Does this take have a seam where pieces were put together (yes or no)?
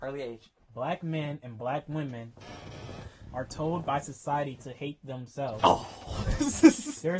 no